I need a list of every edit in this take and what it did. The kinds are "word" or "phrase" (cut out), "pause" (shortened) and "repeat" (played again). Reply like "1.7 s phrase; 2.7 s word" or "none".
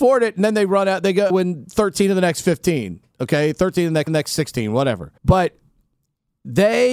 1.3 s word; 4.1 s repeat; 5.2 s pause